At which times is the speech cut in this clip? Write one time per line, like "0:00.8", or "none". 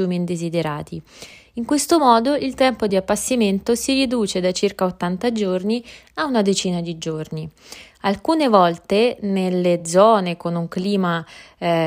none